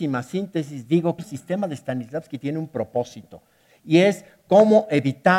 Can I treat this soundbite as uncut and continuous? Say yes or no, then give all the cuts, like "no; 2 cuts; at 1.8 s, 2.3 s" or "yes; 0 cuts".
no; 1 cut; at 1.2 s